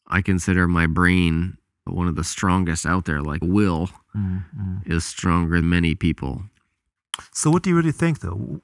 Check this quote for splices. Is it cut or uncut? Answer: cut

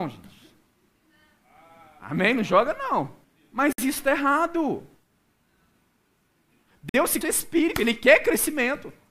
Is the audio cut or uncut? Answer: cut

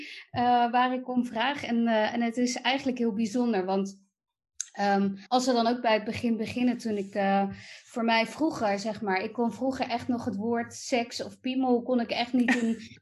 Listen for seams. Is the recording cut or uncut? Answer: cut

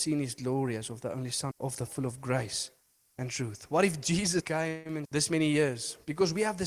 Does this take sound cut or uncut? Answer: cut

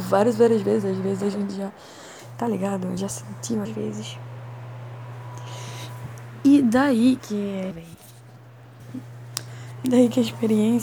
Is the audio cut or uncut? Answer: cut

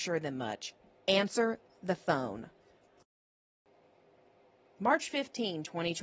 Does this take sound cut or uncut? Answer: uncut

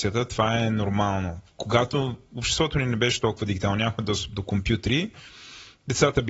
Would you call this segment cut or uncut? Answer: uncut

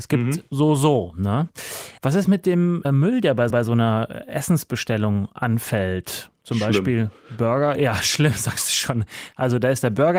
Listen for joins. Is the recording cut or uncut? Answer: cut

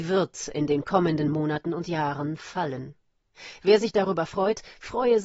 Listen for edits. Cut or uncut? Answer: uncut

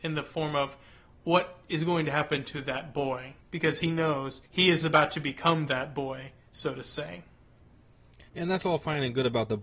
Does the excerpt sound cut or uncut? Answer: cut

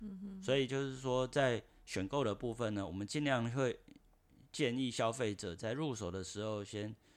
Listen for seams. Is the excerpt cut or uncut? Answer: uncut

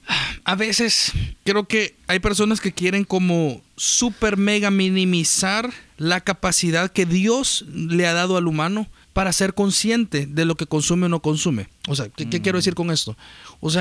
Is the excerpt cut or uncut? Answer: cut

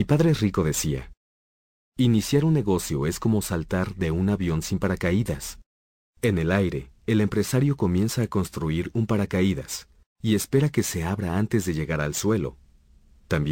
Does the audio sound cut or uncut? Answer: uncut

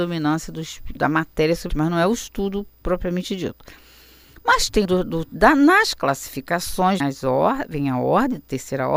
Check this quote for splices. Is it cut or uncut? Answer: cut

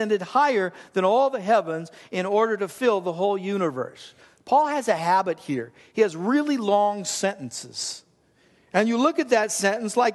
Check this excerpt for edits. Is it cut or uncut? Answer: uncut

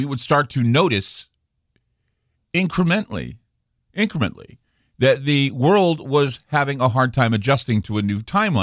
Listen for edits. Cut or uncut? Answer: uncut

